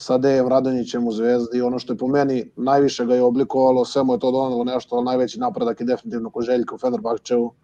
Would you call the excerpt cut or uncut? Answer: uncut